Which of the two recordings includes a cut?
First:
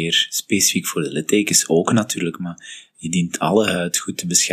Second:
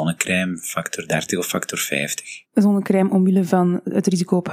second; 1 cut; at 2.4 s

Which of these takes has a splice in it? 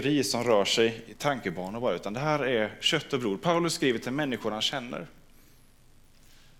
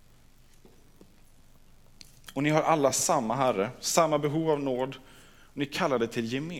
first; 1 cut; at 1.1 s

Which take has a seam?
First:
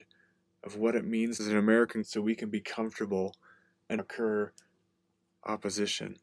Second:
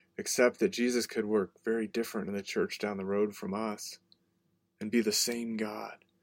first; 3 cuts; at 1.4 s, 2.0 s, 4.0 s

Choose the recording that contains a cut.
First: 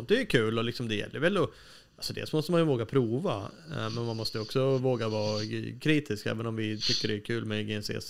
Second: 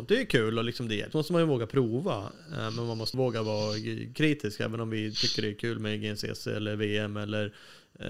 second; 2 cuts; at 1.1 s, 3.1 s

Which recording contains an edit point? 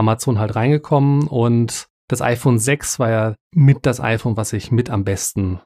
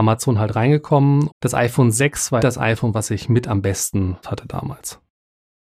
second; 3 cuts; at 1.3 s, 2.4 s, 4.2 s

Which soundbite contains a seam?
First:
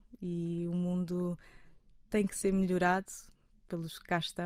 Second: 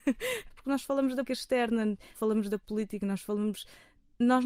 second; 2 cuts; at 1.2 s, 2.1 s

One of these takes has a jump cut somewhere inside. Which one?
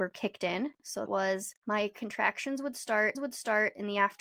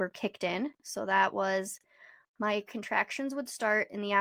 first; 3 cuts; at 1.1 s, 1.6 s, 3.1 s

